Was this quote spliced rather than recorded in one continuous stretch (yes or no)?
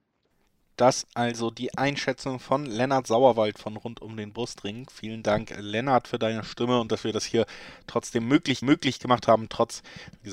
yes